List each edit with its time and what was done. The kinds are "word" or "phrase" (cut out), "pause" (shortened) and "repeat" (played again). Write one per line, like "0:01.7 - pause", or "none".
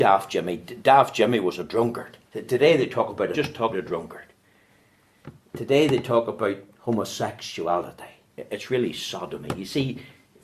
0:02.2 - pause
0:03.3 - phrase
0:03.7 - word
0:08.3 - pause